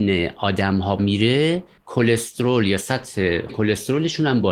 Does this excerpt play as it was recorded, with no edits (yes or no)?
no